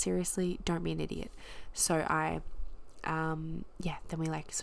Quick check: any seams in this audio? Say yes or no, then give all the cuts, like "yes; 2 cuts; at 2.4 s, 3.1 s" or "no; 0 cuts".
no; 0 cuts